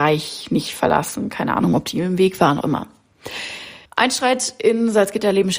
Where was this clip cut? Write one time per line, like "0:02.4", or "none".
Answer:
0:02.6
0:03.8